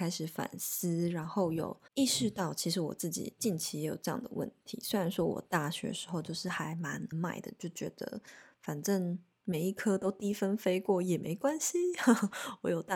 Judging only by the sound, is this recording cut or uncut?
cut